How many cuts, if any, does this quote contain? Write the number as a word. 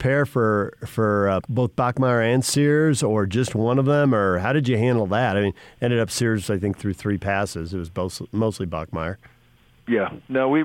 one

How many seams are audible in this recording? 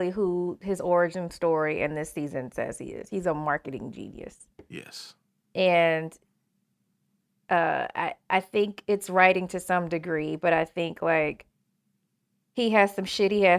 zero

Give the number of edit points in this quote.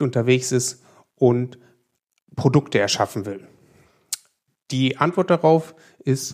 zero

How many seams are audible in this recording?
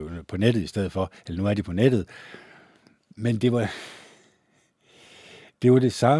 zero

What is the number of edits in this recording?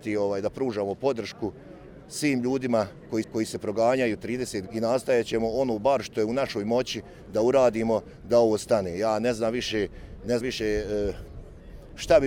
three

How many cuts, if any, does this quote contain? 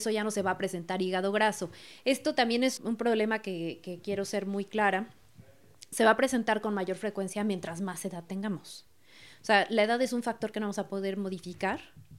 one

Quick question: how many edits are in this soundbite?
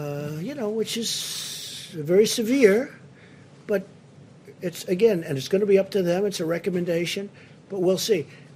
zero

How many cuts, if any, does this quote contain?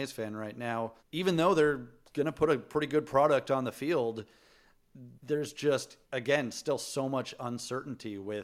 three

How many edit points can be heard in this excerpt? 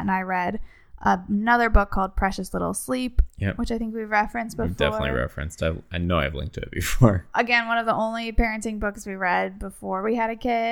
zero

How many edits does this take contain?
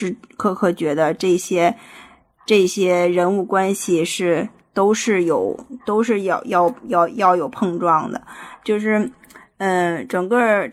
zero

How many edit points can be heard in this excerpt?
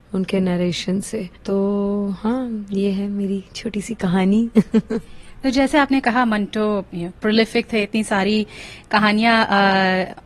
one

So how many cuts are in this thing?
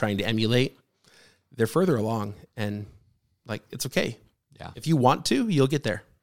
zero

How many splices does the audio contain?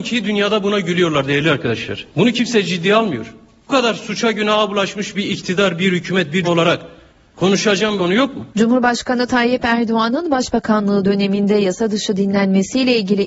five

